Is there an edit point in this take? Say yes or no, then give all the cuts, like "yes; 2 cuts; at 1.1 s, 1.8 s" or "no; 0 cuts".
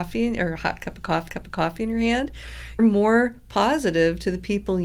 yes; 2 cuts; at 1.3 s, 2.8 s